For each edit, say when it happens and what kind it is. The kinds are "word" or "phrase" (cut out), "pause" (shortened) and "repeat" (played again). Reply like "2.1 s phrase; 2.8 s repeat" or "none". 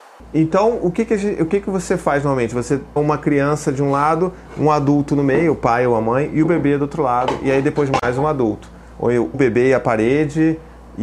3.0 s word; 9.3 s word